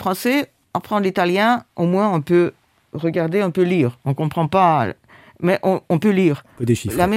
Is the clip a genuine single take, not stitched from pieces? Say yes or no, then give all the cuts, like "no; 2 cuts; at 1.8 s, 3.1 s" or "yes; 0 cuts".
yes; 0 cuts